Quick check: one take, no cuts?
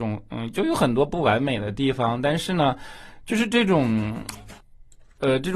yes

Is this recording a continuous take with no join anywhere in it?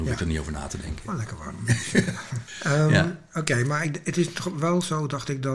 yes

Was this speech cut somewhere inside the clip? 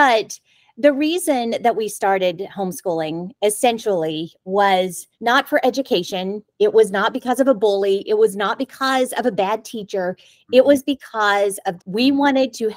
yes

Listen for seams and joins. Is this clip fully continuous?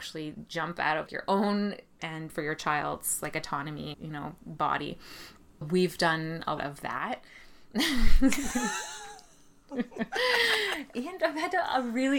no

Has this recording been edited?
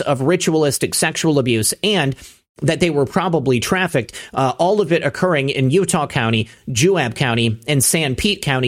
no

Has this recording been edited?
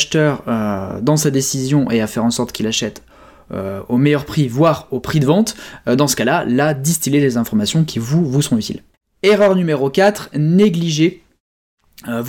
no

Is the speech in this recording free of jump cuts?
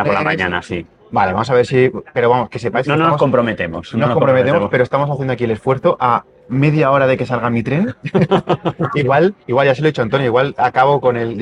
no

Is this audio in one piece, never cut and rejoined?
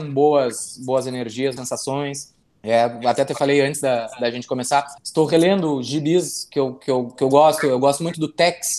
no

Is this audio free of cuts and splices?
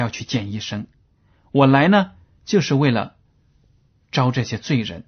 yes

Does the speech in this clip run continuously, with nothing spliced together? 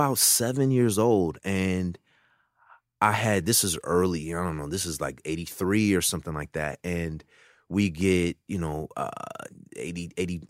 yes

